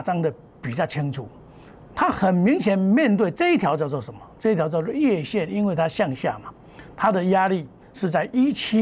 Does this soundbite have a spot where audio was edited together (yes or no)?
no